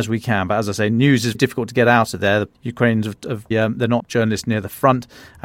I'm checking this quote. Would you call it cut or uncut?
cut